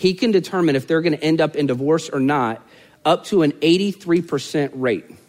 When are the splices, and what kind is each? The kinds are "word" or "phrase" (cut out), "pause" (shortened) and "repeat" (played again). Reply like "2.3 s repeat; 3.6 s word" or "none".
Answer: none

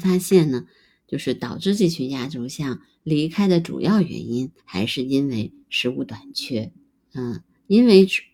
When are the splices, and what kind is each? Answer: 4.6 s pause; 6.9 s pause

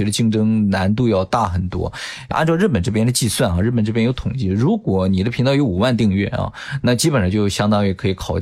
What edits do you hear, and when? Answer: 2.3 s word

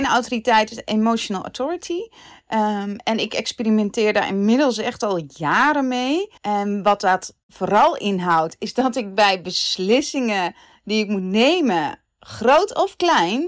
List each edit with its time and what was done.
6.4 s pause

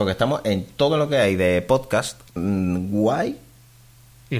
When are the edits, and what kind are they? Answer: 2.3 s pause

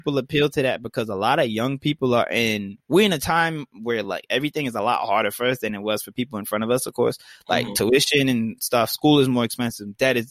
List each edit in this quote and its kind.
none

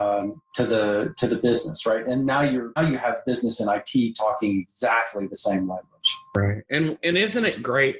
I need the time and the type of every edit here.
2.8 s word

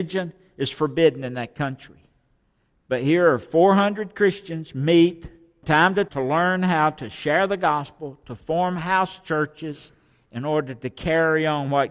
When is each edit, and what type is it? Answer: 5.6 s word; 6.1 s word

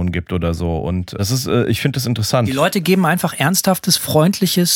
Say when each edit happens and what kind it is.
1.2 s phrase

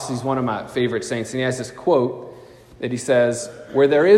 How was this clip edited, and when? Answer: none

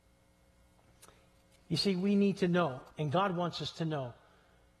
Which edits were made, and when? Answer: 2.9 s pause

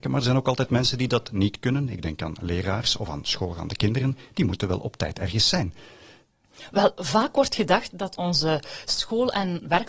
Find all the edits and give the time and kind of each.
none

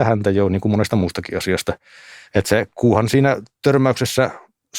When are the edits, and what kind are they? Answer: none

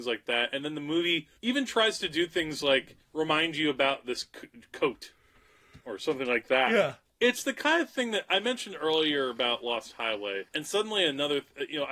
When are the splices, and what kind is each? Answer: 1.4 s pause; 3.0 s pause; 5.8 s pause; 7.1 s pause; 10.5 s pause

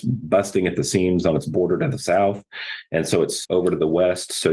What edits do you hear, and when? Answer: 3.4 s word

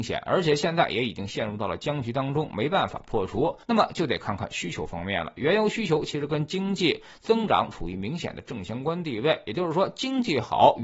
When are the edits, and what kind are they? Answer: 3.6 s pause

